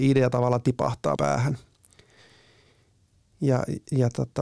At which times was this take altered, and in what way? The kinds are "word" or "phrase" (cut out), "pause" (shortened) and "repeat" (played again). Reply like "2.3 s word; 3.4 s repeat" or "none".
1.2 s word